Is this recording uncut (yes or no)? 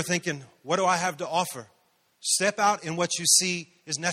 yes